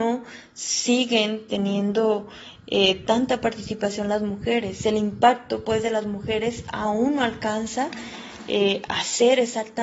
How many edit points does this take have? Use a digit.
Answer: 0